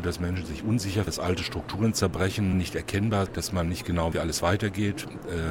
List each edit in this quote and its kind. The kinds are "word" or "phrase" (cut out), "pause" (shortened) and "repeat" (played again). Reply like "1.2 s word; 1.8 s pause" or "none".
1.1 s word; 2.5 s word; 3.3 s word; 4.1 s word